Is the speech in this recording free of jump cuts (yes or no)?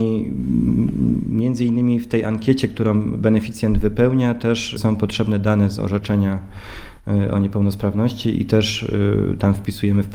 no